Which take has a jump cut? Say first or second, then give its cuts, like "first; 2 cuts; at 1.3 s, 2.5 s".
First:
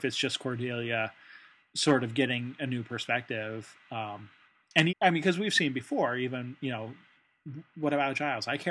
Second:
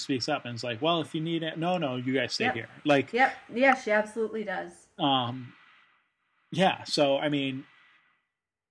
first; 1 cut; at 4.9 s